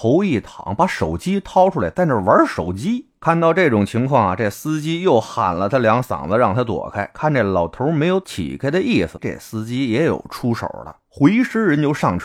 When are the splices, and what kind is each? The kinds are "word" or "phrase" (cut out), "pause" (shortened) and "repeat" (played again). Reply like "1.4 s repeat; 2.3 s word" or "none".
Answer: 9.2 s word